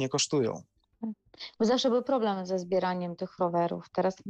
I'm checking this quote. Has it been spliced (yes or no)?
no